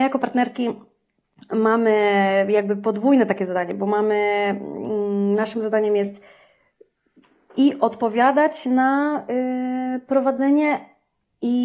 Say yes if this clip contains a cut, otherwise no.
no